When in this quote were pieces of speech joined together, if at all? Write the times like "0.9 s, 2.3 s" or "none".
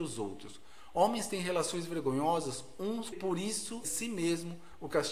3.1 s, 3.8 s